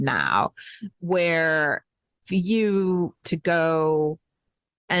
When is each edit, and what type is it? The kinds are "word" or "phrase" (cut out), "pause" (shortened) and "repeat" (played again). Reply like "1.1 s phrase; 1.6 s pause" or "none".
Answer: 2.2 s word; 3.2 s word